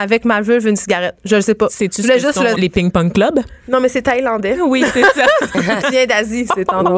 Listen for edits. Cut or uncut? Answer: cut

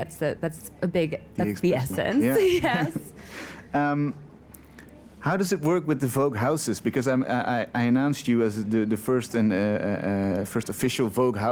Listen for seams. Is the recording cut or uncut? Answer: uncut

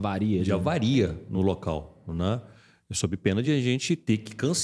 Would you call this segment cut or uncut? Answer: uncut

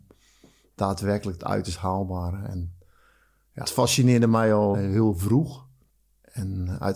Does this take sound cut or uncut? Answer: cut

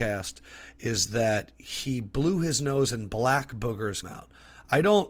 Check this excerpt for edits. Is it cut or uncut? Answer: cut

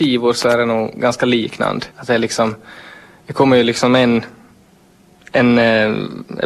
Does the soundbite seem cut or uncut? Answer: cut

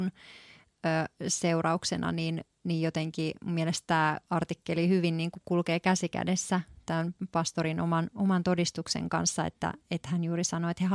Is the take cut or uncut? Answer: cut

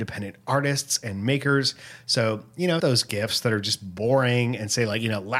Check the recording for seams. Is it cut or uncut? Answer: cut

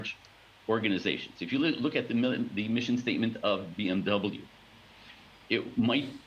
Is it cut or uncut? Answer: uncut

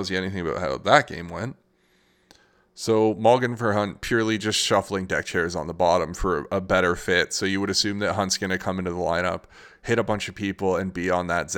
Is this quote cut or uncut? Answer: uncut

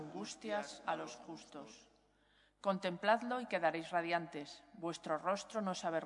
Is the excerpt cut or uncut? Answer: uncut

